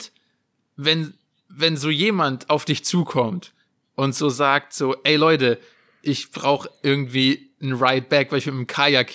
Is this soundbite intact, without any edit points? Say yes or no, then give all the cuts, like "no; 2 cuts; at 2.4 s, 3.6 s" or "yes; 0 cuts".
yes; 0 cuts